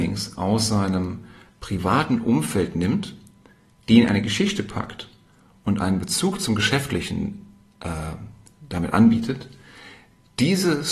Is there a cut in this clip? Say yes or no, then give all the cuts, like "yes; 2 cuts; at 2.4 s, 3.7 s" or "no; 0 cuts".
no; 0 cuts